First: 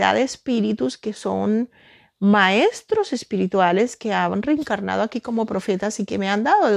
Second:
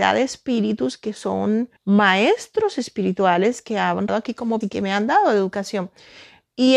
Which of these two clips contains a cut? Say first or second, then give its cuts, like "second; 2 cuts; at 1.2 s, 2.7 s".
second; 3 cuts; at 1.8 s, 4.1 s, 4.6 s